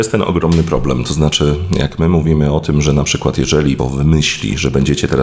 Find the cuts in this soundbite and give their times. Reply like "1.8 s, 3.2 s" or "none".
3.8 s